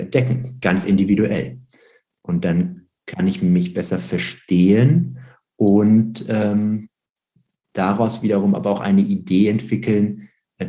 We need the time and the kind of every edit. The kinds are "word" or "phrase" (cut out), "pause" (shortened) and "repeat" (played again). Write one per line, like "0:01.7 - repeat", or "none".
none